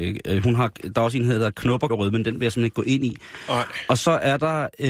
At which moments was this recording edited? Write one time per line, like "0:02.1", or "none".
0:01.9